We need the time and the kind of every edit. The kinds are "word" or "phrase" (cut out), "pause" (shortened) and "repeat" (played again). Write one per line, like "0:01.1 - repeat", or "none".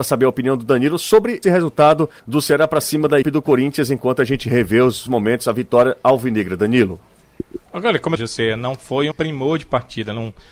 0:01.4 - word
0:02.2 - pause
0:03.2 - word
0:05.1 - word
0:07.7 - pause
0:08.2 - phrase
0:09.1 - word